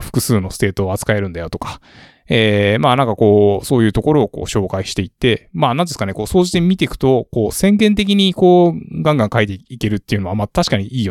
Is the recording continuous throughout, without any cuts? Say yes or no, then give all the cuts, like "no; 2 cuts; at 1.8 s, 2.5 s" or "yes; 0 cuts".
yes; 0 cuts